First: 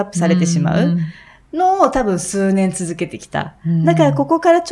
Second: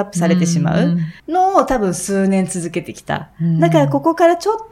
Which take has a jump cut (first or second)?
second